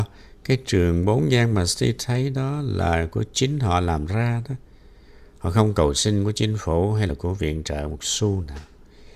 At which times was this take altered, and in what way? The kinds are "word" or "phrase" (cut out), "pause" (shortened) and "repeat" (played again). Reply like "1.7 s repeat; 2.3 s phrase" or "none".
none